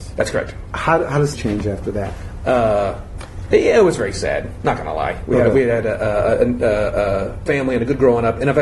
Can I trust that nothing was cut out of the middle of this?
no; 2 cuts; at 1.3 s, 7.5 s

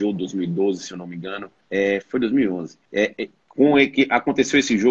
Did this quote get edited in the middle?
yes; 2 cuts; at 1.6 s, 2.9 s

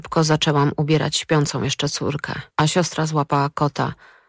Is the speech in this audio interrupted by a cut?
yes; 1 cut; at 2.5 s

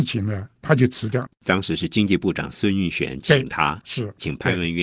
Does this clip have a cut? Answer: no; 0 cuts

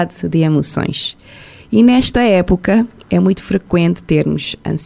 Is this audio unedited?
yes; 0 cuts

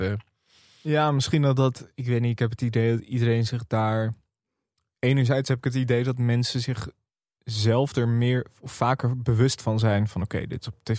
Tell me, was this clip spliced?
no; 0 cuts

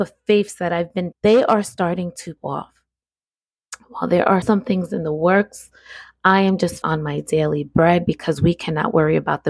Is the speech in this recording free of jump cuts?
no; 4 cuts; at 1.1 s, 2.4 s, 4.4 s, 6.8 s

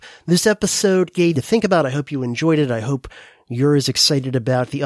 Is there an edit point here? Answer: yes; 1 cut; at 1.3 s

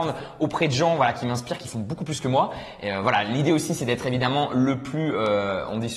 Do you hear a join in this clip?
no; 0 cuts

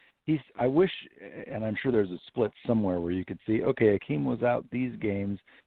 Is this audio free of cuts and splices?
yes; 0 cuts

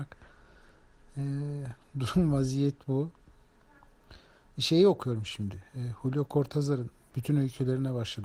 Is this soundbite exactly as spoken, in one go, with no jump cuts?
yes; 0 cuts

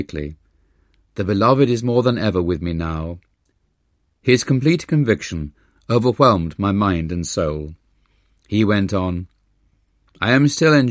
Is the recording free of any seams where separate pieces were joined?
yes; 0 cuts

